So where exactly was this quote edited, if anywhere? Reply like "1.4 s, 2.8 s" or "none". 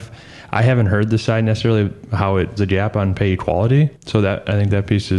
2.6 s, 4.0 s